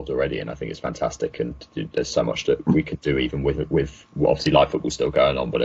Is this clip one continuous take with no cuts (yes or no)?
yes